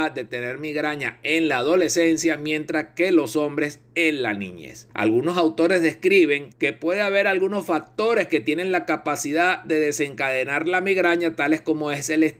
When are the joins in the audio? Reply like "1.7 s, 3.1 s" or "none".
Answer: 4.9 s, 6.5 s